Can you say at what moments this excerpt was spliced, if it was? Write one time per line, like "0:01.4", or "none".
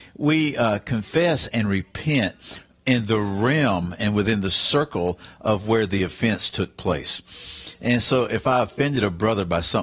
none